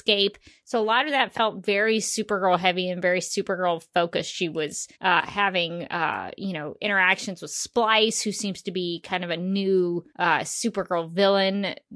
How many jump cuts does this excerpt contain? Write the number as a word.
two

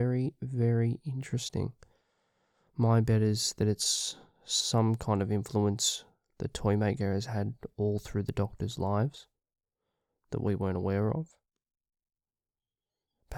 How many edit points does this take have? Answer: zero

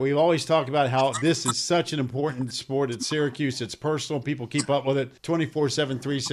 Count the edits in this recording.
one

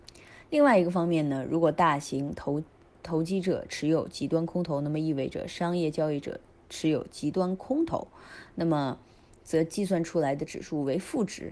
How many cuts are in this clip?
zero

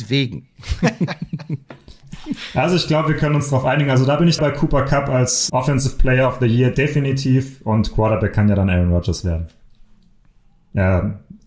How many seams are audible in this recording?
two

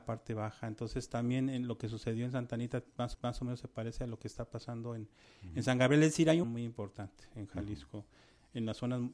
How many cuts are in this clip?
two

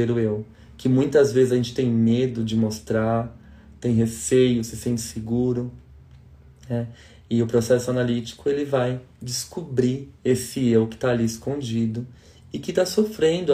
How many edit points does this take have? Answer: one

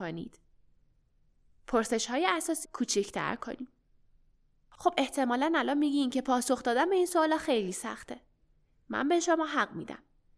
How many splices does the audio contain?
one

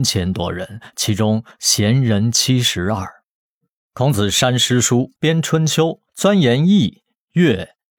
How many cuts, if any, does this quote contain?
two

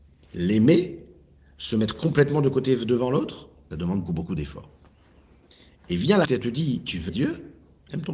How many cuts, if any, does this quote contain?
four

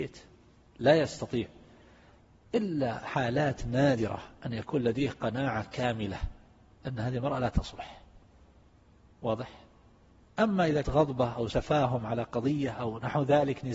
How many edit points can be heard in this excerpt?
two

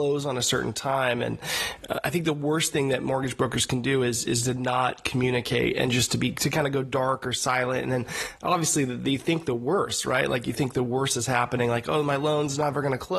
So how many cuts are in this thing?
zero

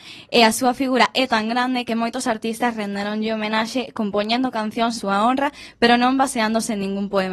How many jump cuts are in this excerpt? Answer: one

